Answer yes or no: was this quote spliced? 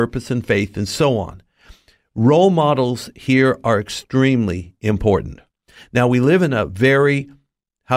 no